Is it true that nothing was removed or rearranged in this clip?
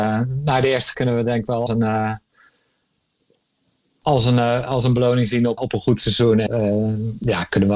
no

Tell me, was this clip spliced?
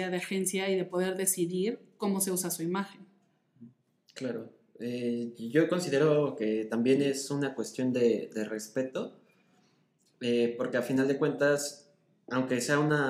no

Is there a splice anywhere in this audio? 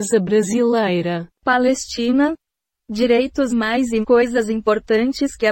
yes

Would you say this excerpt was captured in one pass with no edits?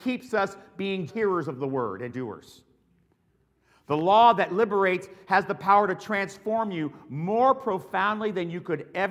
no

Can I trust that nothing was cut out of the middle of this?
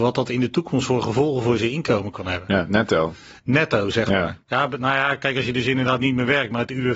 no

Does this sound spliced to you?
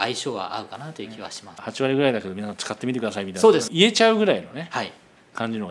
yes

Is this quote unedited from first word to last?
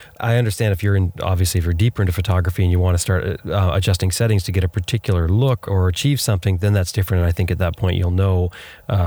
yes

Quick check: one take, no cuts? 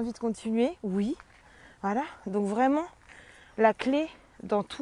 yes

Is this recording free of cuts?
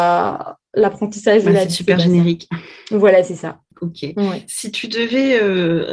yes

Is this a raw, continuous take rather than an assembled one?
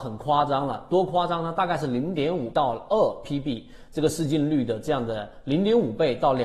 no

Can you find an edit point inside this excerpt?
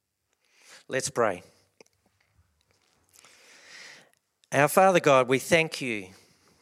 no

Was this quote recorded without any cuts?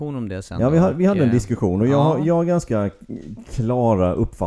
yes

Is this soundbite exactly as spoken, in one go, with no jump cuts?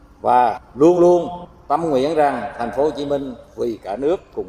yes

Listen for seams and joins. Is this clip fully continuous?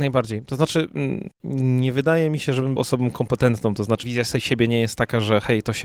no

